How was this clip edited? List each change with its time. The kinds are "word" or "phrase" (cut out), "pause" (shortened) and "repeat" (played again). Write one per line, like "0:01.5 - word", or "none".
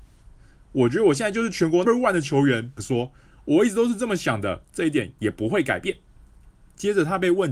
0:01.8 - word
0:02.8 - word

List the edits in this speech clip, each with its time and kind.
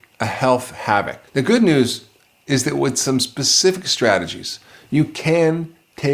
0:01.3 - pause

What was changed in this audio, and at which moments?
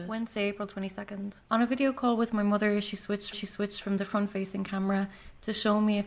0:01.4 - pause
0:03.3 - repeat

